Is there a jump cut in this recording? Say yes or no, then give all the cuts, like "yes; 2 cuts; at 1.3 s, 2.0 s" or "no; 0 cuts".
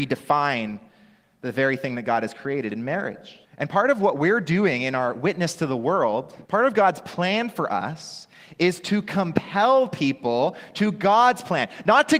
yes; 2 cuts; at 3.5 s, 6.4 s